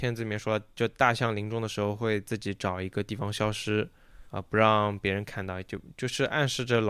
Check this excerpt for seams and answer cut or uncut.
cut